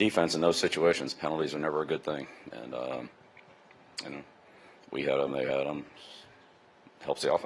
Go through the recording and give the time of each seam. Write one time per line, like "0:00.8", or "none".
none